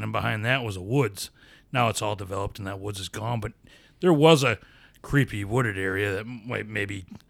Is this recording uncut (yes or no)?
yes